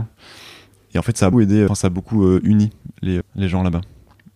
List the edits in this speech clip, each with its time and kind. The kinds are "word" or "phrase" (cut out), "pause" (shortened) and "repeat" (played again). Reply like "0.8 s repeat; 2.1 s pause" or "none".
1.3 s word; 1.7 s word; 3.2 s word

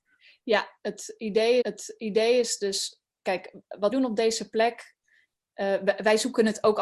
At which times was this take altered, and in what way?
1.6 s repeat; 3.1 s pause; 3.9 s word

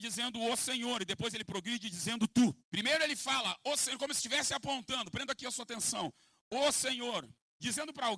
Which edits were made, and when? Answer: 2.6 s pause

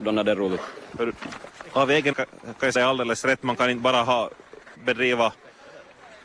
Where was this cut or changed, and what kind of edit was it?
2.1 s word; 2.7 s phrase; 4.7 s pause

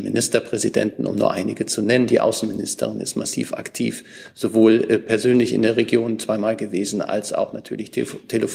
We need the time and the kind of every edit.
none

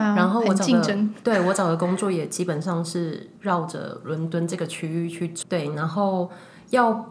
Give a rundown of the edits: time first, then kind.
3.4 s pause; 5.4 s word

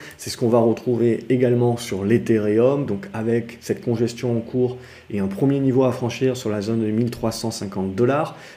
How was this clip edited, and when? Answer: none

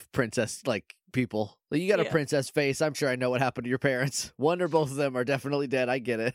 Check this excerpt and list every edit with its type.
2.9 s word

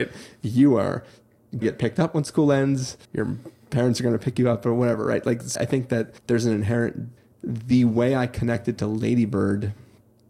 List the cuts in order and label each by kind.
1.6 s word; 3.0 s pause; 5.5 s word; 6.2 s pause; 7.2 s pause

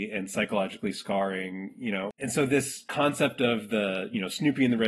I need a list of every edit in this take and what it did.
none

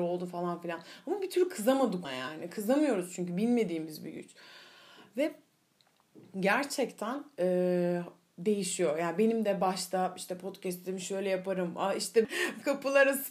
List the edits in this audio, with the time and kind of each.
2.0 s word; 12.2 s word

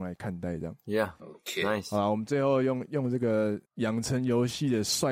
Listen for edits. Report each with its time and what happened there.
3.7 s pause

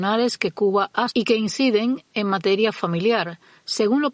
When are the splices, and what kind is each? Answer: 1.1 s word

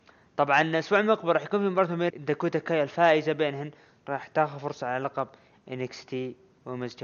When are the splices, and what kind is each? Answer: 2.1 s word

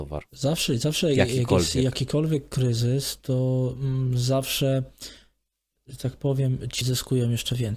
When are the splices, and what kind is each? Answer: 6.8 s word

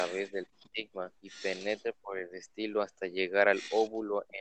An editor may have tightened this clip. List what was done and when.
1.2 s pause

